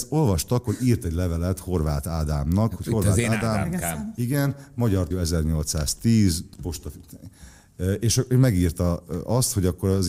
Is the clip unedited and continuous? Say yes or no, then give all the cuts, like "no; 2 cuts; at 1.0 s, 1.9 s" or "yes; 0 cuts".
no; 1 cut; at 5.1 s